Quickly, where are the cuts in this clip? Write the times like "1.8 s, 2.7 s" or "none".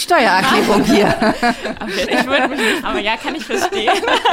2.1 s, 2.8 s